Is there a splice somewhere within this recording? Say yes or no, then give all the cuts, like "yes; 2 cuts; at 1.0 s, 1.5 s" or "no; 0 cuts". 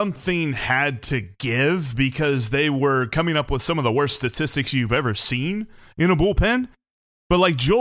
no; 0 cuts